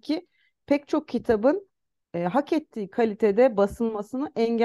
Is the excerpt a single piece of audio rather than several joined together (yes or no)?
yes